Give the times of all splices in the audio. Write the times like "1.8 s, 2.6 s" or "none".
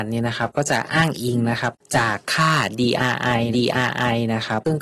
3.5 s